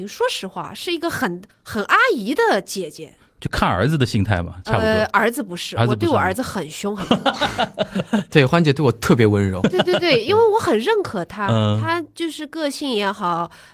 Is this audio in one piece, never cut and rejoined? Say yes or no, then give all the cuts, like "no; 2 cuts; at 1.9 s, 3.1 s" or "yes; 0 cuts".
no; 1 cut; at 1.5 s